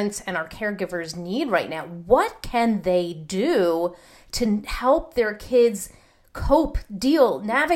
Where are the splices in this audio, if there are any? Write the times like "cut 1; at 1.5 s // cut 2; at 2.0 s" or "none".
none